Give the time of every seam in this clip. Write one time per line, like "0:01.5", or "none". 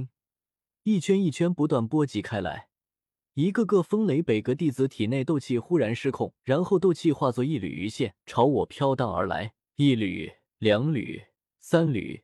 0:06.4
0:08.2
0:09.7